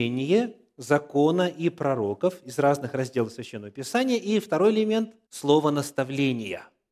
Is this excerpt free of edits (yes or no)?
no